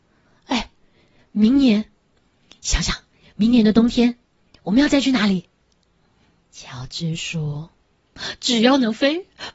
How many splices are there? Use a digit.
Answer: 0